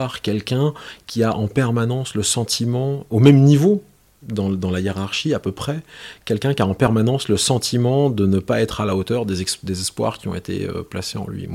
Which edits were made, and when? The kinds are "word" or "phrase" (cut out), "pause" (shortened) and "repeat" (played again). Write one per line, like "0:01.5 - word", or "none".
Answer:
none